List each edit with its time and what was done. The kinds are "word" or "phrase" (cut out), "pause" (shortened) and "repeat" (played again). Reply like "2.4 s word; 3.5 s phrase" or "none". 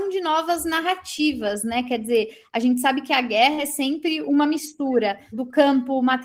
5.3 s word